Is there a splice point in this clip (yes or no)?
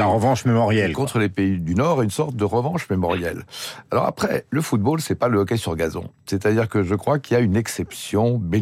no